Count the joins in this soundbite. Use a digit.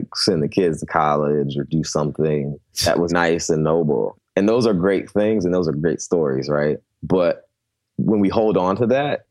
1